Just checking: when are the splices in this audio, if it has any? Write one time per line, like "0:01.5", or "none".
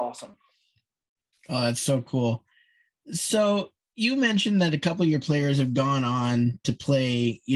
none